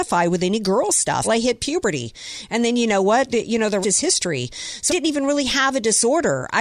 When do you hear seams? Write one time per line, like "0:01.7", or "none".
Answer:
0:01.2
0:03.8
0:04.9